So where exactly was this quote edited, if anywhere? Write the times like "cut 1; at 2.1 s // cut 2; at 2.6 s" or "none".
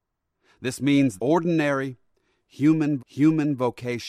cut 1; at 1.2 s // cut 2; at 3.0 s